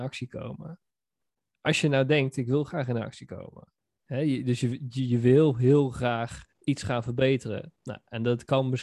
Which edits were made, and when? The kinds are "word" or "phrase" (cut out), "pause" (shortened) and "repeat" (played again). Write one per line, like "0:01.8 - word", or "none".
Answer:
0:06.5 - pause